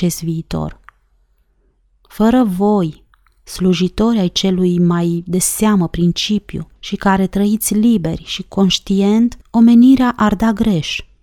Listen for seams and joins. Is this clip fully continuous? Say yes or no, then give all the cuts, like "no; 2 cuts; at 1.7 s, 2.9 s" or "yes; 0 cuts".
no; 2 cuts; at 6.8 s, 9.4 s